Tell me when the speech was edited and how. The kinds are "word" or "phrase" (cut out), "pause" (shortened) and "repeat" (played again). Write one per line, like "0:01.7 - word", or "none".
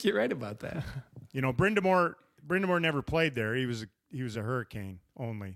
none